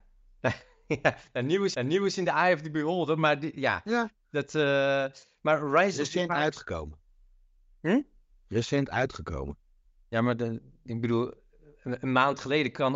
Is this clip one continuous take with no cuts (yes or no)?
no